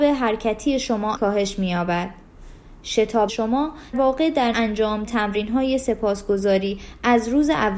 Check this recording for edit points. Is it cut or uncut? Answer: cut